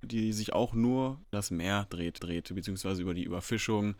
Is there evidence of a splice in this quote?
yes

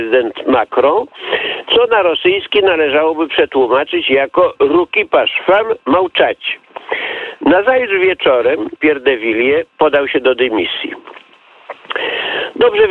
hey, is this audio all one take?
no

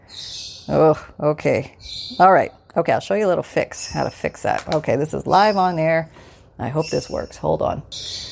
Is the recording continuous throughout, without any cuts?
yes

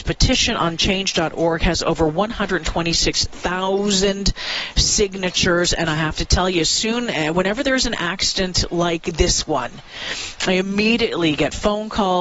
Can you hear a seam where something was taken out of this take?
no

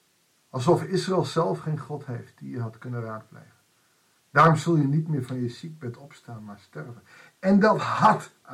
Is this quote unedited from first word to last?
yes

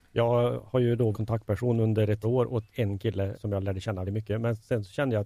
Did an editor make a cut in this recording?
yes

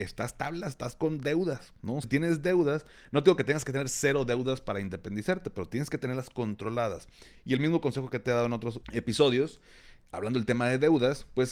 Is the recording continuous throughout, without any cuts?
no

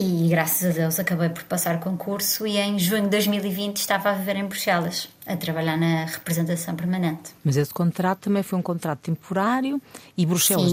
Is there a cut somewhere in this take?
yes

